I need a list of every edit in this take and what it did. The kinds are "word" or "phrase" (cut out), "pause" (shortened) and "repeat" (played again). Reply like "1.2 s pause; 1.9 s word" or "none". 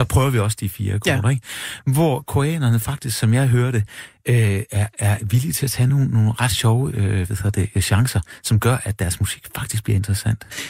none